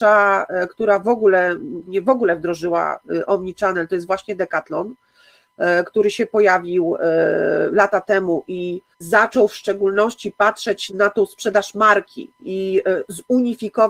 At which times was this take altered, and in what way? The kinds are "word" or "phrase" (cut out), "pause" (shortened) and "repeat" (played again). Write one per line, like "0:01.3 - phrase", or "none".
0:01.8 - word
0:08.9 - pause
0:10.9 - word